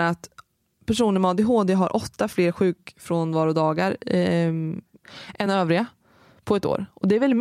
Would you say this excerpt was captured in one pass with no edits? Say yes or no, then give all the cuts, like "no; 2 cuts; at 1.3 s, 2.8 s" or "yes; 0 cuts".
yes; 0 cuts